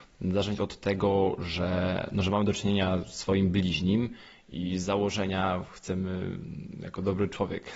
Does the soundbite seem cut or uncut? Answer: uncut